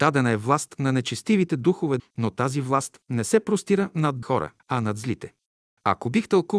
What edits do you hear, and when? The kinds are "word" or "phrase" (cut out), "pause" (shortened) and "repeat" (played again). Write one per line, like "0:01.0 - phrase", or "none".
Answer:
0:02.0 - phrase
0:04.2 - word
0:04.6 - pause